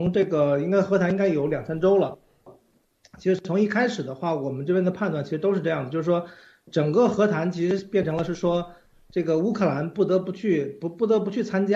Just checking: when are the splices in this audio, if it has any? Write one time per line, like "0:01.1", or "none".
none